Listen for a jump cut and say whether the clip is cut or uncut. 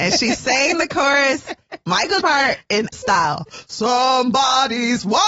cut